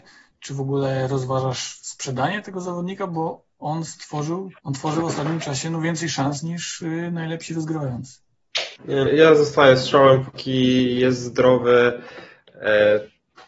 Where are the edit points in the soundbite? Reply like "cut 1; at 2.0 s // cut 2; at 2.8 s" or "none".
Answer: cut 1; at 4.6 s // cut 2; at 8.8 s // cut 3; at 9.1 s

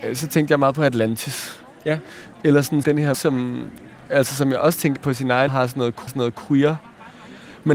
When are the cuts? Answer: cut 1; at 2.8 s // cut 2; at 3.1 s // cut 3; at 5.0 s // cut 4; at 5.5 s // cut 5; at 6.1 s

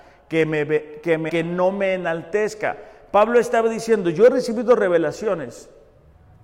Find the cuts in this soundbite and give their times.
cut 1; at 1.3 s

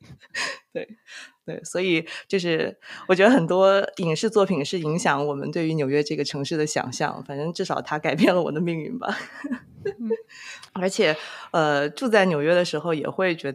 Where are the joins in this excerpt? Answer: cut 1; at 10.7 s

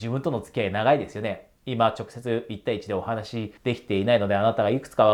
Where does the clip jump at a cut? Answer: cut 1; at 1.6 s // cut 2; at 3.6 s

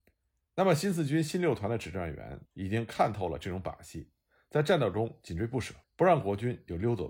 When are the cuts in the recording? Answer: cut 1; at 2.5 s // cut 2; at 5.8 s

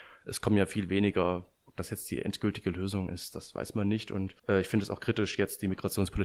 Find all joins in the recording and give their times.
cut 1; at 4.4 s

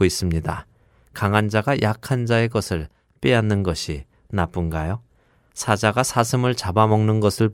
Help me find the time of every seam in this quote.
none

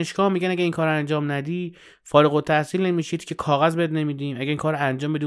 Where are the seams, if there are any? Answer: none

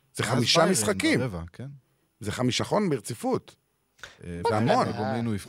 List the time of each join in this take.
cut 1; at 2.6 s

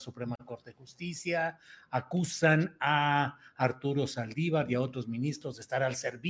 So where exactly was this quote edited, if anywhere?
none

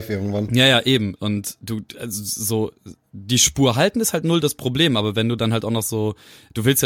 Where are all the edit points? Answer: none

